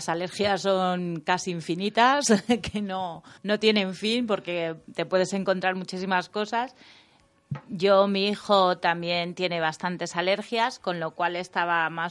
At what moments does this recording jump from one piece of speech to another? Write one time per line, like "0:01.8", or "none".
0:03.4